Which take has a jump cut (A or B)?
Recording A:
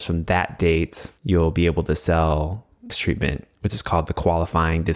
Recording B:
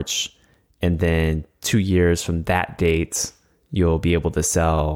A